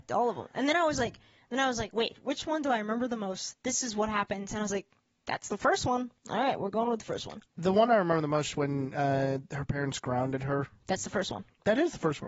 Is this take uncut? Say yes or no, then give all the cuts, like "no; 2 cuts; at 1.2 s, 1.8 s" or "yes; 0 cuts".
yes; 0 cuts